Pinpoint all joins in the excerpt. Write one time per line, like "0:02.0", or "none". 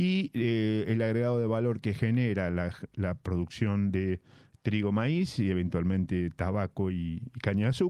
none